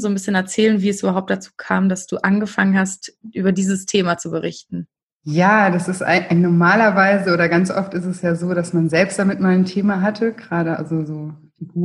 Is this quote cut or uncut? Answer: uncut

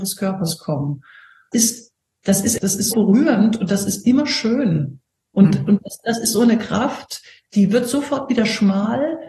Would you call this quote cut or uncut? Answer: cut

